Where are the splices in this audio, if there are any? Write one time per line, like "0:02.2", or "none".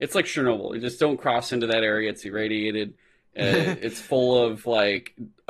none